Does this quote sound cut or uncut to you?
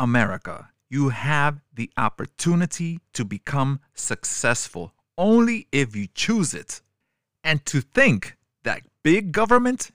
uncut